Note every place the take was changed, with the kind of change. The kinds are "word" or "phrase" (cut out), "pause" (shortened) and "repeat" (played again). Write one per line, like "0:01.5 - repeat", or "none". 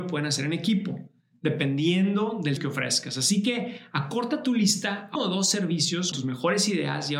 0:02.6 - word
0:05.2 - word
0:06.1 - word